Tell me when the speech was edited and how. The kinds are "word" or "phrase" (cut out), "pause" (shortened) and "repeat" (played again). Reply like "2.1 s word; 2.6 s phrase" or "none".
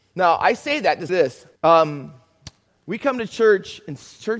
1.1 s word; 1.6 s pause

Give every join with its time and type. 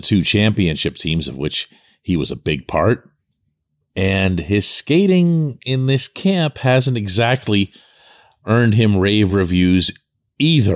none

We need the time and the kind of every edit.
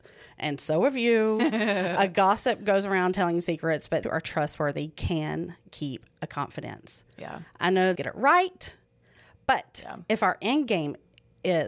4.0 s word; 7.9 s phrase

